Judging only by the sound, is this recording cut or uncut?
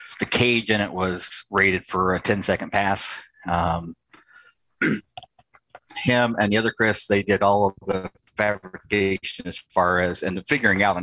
uncut